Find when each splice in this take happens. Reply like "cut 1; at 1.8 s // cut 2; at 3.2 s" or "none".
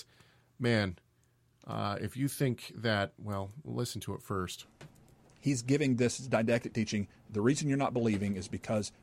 none